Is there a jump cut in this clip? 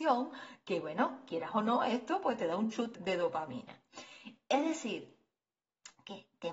yes; 1 cut; at 3.0 s

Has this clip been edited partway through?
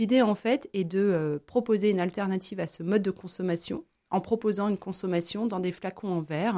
no; 0 cuts

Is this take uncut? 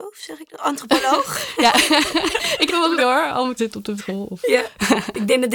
no; 4 cuts; at 2.7 s, 3.0 s, 3.6 s, 4.0 s

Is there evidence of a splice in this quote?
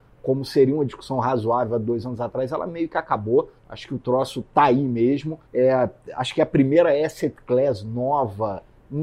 yes; 2 cuts; at 3.6 s, 5.5 s

